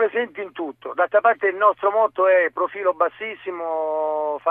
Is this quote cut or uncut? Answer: uncut